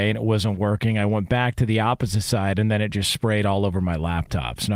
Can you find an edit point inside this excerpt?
no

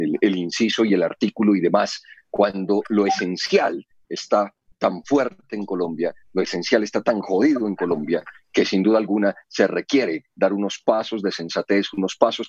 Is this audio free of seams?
yes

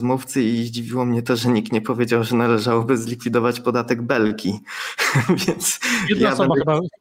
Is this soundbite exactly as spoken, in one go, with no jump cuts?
yes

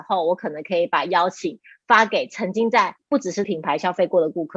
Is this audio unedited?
no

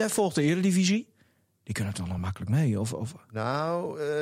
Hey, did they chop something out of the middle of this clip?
no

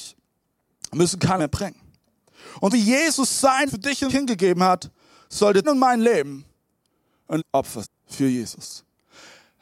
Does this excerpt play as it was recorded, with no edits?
no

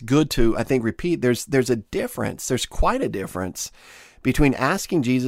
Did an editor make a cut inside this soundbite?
no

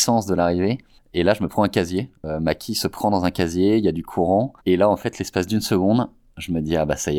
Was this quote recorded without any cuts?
no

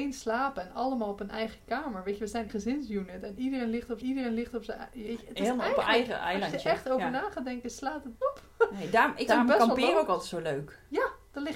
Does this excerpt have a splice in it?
yes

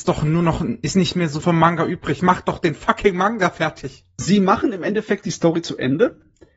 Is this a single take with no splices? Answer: no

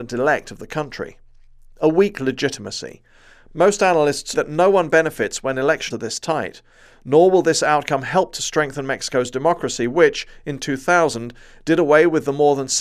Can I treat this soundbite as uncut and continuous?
no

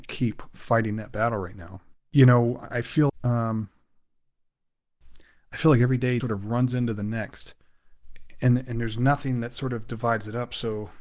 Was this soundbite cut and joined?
yes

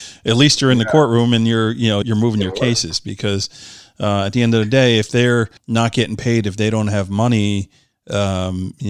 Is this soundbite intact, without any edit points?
no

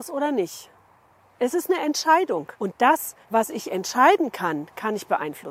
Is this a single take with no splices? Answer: no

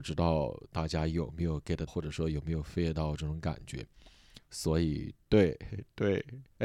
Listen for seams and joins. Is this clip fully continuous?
no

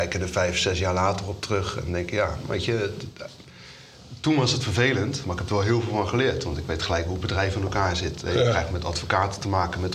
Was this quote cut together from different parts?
no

